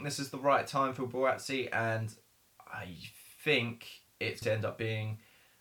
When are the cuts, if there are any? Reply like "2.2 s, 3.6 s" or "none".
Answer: 4.4 s